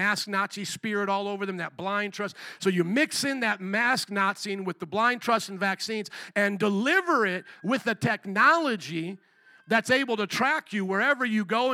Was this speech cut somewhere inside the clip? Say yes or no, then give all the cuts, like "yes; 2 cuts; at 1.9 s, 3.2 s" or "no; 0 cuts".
no; 0 cuts